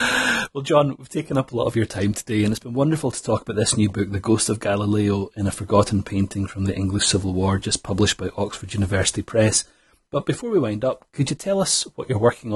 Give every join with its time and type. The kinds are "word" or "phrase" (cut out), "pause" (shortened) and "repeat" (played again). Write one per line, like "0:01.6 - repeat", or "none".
none

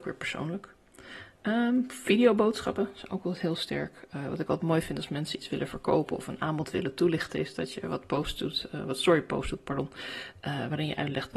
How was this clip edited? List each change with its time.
none

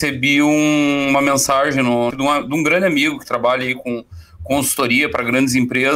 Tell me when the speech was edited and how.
0:02.1 - phrase

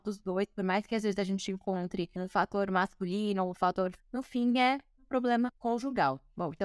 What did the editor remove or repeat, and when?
0:04.0 - word
0:05.6 - pause

